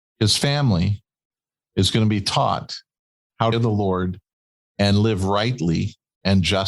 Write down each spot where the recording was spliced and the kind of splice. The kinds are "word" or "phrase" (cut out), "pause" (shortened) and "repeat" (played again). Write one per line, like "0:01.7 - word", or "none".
0:03.5 - phrase